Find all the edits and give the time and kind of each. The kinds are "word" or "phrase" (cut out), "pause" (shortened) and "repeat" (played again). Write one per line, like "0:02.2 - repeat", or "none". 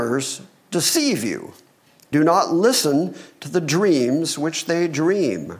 0:02.1 - word